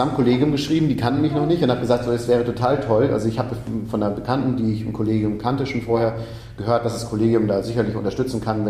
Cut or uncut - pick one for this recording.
uncut